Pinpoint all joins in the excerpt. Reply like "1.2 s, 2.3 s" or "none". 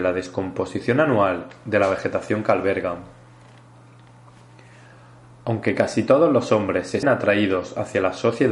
7.0 s